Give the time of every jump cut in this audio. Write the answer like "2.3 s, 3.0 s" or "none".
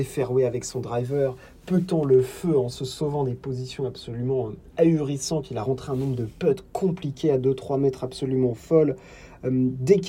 none